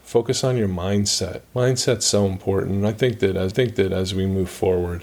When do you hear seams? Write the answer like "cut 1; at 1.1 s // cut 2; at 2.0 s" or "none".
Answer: cut 1; at 1.5 s // cut 2; at 3.5 s